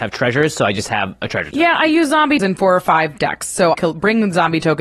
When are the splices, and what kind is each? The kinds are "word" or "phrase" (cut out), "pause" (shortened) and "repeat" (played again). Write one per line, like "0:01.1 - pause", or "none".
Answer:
0:02.4 - word
0:03.2 - word
0:03.7 - word